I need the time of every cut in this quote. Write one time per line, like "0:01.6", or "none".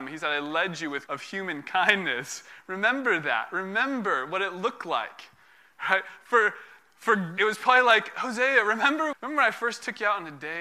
0:01.1
0:07.4
0:09.1